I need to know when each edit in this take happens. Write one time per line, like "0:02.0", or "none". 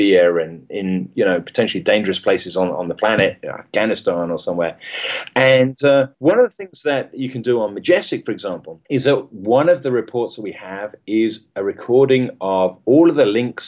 0:06.1
0:08.8